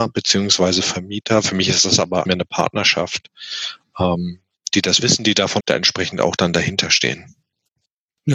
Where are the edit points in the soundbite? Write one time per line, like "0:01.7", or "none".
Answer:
0:02.2
0:04.7
0:05.6